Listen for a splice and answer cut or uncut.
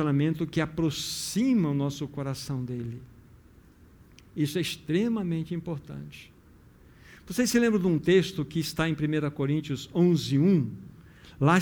uncut